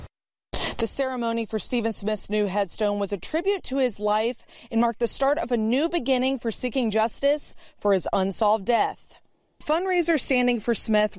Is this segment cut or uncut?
uncut